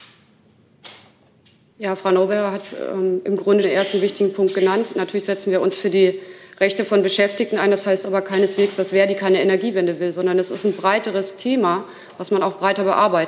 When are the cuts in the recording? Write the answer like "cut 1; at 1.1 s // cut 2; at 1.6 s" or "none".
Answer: cut 1; at 3.6 s